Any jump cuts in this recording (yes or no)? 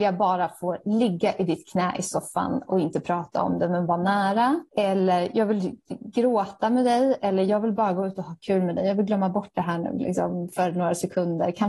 yes